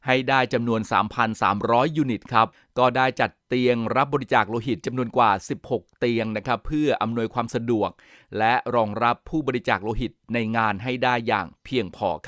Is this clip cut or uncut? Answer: uncut